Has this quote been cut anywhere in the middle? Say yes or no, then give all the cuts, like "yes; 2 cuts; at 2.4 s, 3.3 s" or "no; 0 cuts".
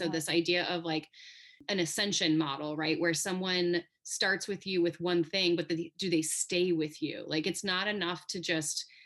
no; 0 cuts